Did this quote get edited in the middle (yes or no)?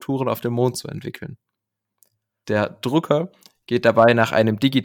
no